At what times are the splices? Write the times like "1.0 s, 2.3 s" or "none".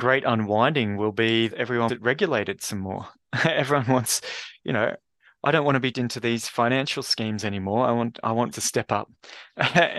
1.5 s, 1.9 s, 5.9 s, 8.5 s

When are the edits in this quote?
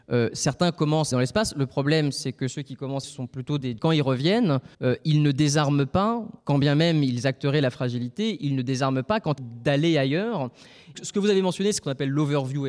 1.1 s, 3.0 s, 3.8 s, 4.7 s, 6.4 s, 9.4 s, 10.9 s

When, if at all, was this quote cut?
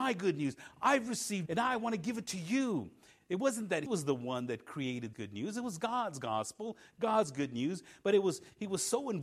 1.5 s, 3.9 s, 5.1 s

